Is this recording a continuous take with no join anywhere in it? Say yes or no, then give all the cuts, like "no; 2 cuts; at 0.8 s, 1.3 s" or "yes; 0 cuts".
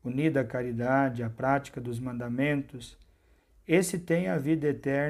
yes; 0 cuts